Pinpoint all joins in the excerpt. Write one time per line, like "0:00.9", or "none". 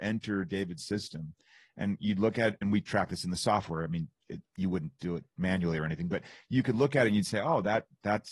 none